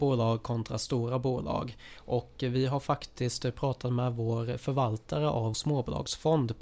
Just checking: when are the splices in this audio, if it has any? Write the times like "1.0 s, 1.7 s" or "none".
5.5 s